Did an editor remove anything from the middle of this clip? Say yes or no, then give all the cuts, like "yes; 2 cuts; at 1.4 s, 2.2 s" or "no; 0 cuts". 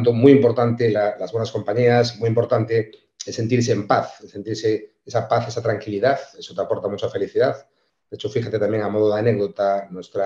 no; 0 cuts